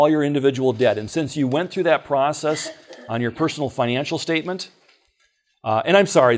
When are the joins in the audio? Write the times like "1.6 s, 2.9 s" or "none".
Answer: none